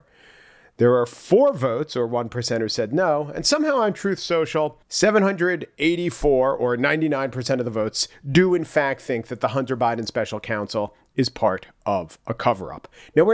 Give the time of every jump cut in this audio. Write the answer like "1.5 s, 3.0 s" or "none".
4.8 s